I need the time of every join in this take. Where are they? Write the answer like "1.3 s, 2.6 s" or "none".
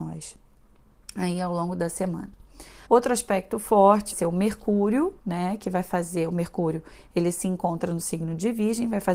2.9 s, 4.1 s, 5.2 s